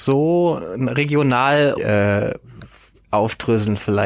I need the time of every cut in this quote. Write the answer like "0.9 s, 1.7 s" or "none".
1.8 s